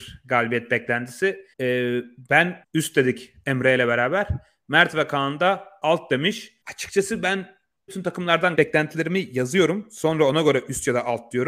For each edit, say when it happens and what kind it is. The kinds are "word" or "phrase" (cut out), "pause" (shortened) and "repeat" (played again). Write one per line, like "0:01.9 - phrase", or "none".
0:01.5 - pause
0:02.6 - phrase
0:06.6 - pause
0:07.9 - phrase
0:08.6 - word